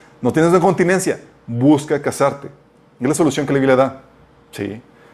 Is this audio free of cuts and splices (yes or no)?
yes